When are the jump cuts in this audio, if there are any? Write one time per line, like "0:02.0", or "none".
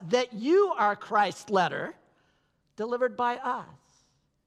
none